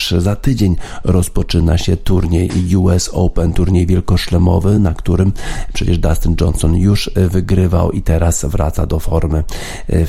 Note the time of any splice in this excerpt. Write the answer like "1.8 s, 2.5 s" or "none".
none